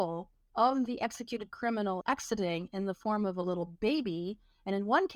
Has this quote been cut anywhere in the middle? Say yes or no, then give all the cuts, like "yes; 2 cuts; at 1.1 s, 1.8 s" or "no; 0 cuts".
yes; 1 cut; at 2.0 s